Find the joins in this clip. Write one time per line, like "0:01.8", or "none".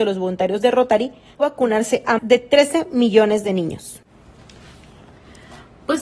0:01.4
0:02.2